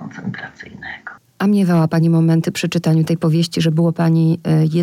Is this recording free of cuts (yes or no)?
yes